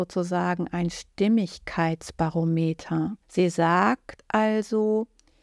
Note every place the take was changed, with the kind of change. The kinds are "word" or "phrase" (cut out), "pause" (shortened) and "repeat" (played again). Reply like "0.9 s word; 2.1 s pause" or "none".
3.2 s pause